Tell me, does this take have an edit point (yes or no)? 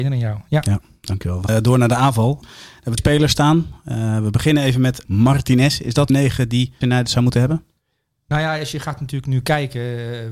yes